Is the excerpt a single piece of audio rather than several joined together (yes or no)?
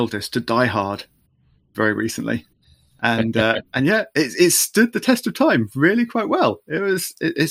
yes